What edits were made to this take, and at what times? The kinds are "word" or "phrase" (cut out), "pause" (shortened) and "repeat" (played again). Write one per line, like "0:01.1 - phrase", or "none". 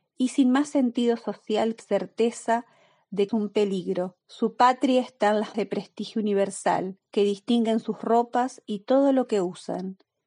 0:01.8 - word
0:03.3 - phrase
0:04.2 - pause
0:05.5 - word
0:07.1 - pause